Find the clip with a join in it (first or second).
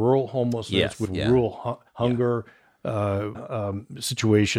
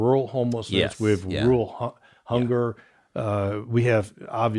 first